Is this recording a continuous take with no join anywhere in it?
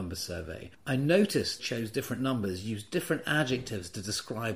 no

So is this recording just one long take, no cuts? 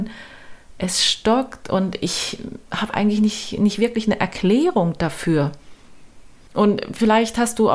yes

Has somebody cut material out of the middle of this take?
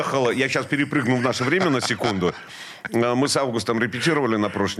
no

